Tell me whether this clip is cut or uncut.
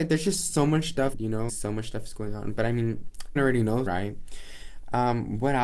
cut